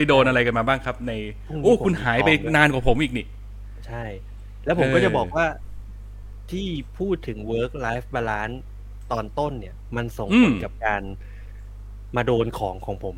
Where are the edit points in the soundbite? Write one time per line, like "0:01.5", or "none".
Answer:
none

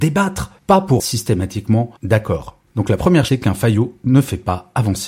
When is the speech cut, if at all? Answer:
0:01.0
0:02.0
0:03.3

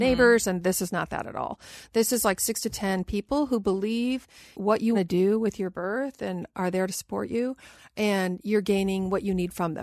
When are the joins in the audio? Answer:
0:04.5
0:04.9

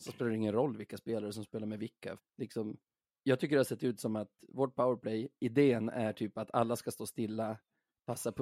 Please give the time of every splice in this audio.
0:02.2

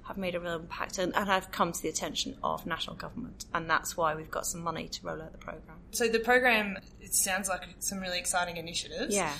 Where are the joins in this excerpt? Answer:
none

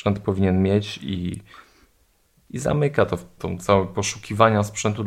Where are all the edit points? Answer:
0:03.4

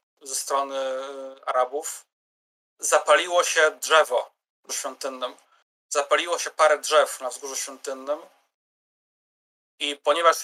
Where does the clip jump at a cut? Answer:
0:04.7

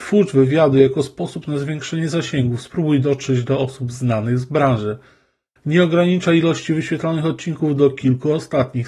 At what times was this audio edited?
none

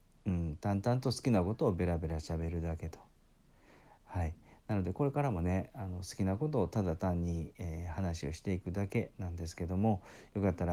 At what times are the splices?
none

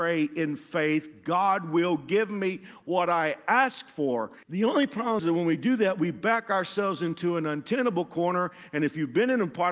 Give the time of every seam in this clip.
0:04.4
0:05.2

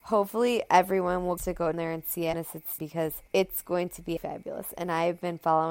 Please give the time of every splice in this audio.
0:01.4
0:01.7
0:02.3
0:02.8
0:03.3
0:04.2

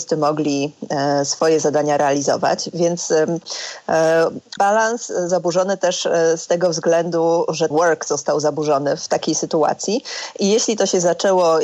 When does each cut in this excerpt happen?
0:04.6
0:05.3
0:07.7
0:09.0

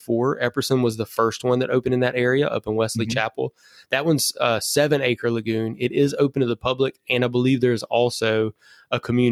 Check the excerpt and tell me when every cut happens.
none

